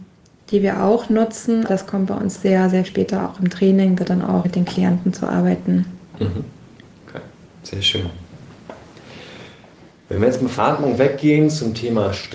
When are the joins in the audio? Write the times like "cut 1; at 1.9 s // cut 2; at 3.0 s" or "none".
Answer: cut 1; at 1.7 s // cut 2; at 2.4 s // cut 3; at 2.9 s // cut 4; at 4.0 s // cut 5; at 4.4 s // cut 6; at 10.6 s